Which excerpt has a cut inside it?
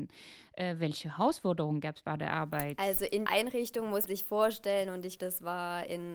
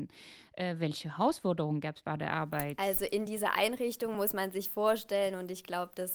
first; 3 cuts; at 3.3 s, 4.1 s, 5.2 s

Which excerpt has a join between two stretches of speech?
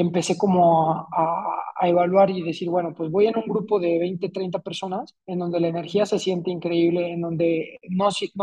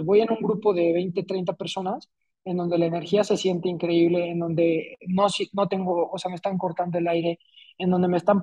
first; 1 cut; at 5.2 s

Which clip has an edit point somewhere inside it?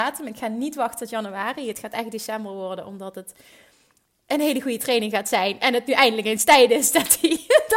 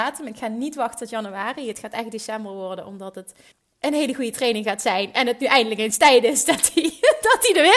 second; 1 cut; at 3.5 s

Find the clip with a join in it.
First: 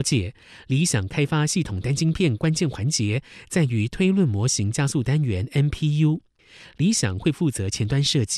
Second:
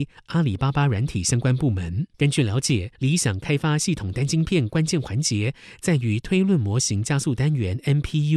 second; 2 cuts; at 2.1 s, 2.9 s

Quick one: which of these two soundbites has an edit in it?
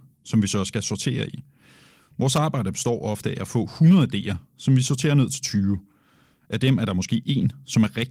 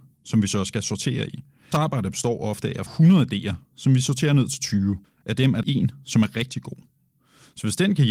second; 4 cuts; at 1.7 s, 2.9 s, 5.0 s, 5.6 s

